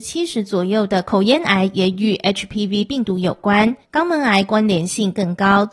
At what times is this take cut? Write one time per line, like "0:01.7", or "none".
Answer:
0:03.8